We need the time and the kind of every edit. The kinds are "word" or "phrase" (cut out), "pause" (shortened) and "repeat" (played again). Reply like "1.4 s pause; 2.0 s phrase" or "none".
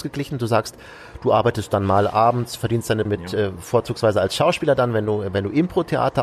3.1 s word